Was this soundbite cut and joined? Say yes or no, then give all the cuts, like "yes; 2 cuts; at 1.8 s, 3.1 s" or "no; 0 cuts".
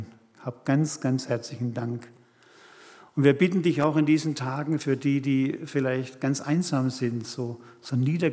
no; 0 cuts